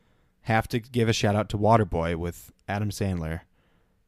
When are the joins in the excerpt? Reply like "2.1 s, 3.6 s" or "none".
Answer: none

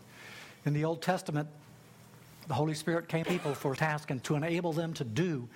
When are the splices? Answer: 2.5 s, 3.2 s, 3.8 s, 4.2 s

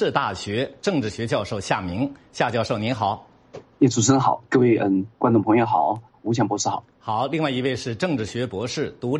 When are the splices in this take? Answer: 6.9 s

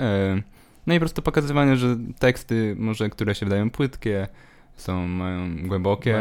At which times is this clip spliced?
none

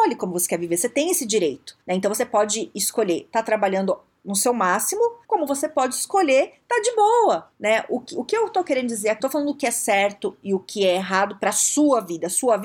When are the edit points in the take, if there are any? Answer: 1.8 s, 5.2 s, 7.5 s, 9.2 s

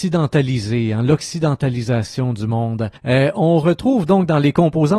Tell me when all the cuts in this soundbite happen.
3.0 s

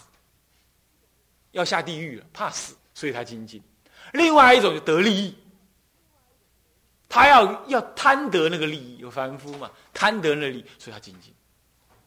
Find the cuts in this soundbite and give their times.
2.8 s

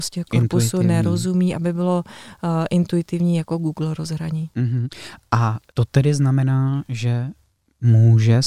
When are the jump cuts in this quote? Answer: none

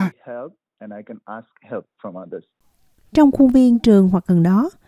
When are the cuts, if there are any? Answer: none

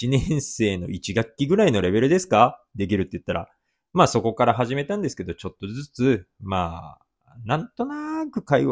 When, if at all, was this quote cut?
none

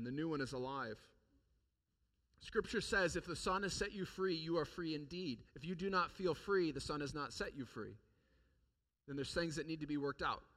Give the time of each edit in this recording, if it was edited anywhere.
5.5 s

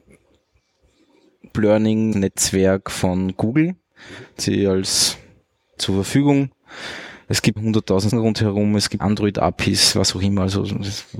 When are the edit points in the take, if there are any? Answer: 1.5 s, 2.1 s, 4.4 s, 5.8 s, 7.6 s, 8.1 s, 9.0 s

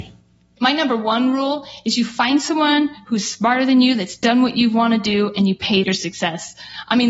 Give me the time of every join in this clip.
5.8 s

